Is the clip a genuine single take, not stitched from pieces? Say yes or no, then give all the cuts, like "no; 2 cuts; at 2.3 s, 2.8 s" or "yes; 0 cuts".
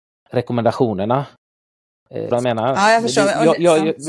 no; 1 cut; at 2.3 s